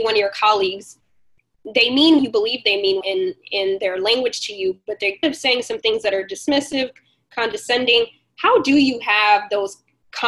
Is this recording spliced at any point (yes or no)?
yes